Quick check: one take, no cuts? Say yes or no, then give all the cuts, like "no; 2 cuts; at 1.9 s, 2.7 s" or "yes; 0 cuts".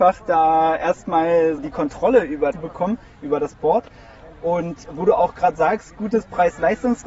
no; 3 cuts; at 1.6 s, 2.5 s, 4.9 s